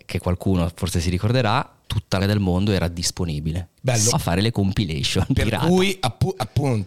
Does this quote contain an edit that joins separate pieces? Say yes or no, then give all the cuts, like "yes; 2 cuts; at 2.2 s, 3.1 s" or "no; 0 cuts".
yes; 4 cuts; at 1.8 s, 2.2 s, 3.8 s, 4.1 s